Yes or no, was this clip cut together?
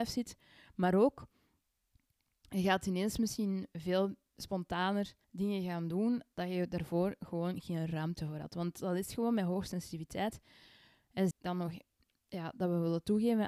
yes